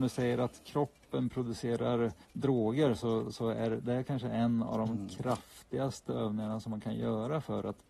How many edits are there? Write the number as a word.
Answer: one